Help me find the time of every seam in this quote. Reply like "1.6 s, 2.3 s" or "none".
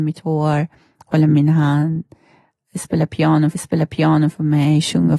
3.5 s